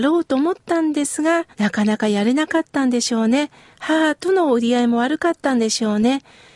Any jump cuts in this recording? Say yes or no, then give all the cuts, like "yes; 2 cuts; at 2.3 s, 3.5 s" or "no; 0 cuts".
yes; 1 cut; at 1.5 s